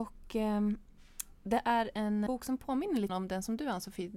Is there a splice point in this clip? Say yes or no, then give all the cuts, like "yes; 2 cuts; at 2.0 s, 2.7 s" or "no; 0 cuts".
yes; 2 cuts; at 2.3 s, 3.1 s